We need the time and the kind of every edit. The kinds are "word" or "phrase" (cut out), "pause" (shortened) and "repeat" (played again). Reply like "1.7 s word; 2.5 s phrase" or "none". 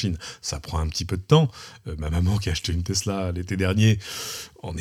none